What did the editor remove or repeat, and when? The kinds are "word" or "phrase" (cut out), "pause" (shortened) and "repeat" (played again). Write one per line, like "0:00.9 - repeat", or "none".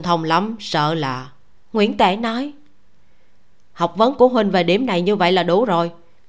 0:01.5 - pause

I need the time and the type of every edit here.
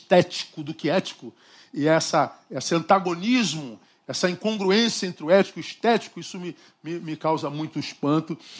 none

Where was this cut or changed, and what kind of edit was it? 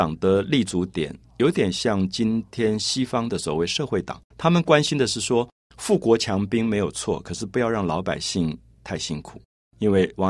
0:04.3 - pause

